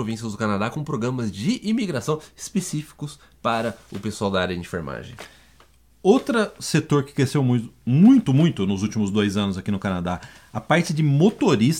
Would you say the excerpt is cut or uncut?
uncut